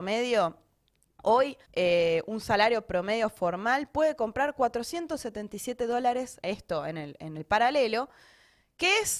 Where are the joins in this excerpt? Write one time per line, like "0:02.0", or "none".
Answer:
0:01.6
0:06.4